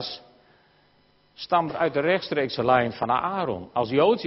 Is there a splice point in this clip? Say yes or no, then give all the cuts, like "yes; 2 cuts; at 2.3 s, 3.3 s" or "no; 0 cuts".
yes; 1 cut; at 1.7 s